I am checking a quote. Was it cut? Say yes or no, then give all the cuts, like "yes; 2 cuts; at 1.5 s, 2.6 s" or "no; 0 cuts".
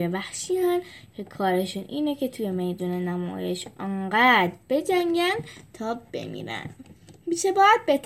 no; 0 cuts